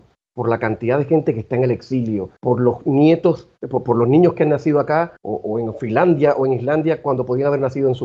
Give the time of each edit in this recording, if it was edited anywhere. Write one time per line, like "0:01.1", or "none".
0:02.4
0:03.6
0:05.2